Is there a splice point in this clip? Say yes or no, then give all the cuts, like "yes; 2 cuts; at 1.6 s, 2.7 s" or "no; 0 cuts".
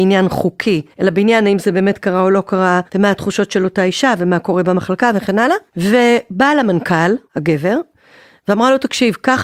yes; 4 cuts; at 0.9 s, 2.9 s, 5.7 s, 7.3 s